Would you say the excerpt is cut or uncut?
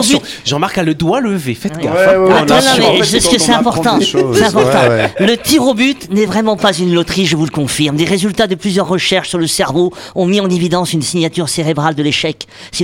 uncut